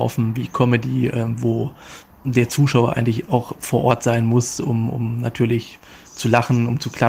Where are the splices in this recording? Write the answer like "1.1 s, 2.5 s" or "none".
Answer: none